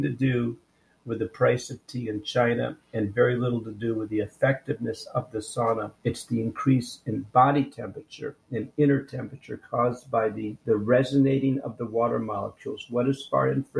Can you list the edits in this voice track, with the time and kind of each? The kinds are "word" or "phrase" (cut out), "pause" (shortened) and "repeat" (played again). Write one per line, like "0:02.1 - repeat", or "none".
0:06.0 - pause
0:10.6 - pause